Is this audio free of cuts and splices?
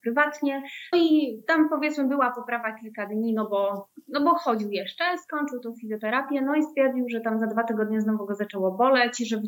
no; 1 cut; at 0.9 s

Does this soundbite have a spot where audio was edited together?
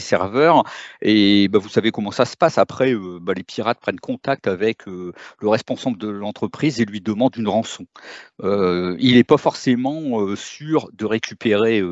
no; 0 cuts

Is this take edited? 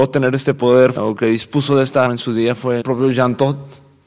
yes; 3 cuts; at 1.0 s, 2.1 s, 2.8 s

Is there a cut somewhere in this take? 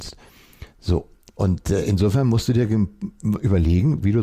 no; 0 cuts

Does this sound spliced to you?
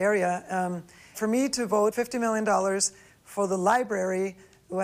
yes; 2 cuts; at 1.1 s, 1.9 s

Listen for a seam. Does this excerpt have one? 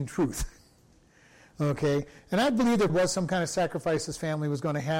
yes; 1 cut; at 2.9 s

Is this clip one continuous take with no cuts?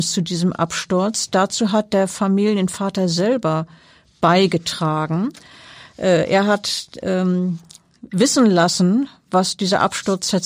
yes; 0 cuts

